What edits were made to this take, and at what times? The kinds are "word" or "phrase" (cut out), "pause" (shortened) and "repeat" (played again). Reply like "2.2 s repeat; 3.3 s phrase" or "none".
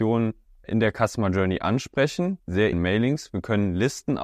2.4 s word; 2.7 s word